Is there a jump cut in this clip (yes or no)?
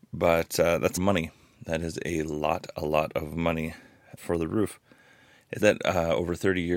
yes